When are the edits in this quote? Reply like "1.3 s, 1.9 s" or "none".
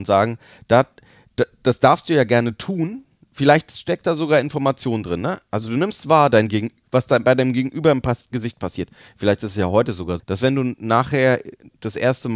10.2 s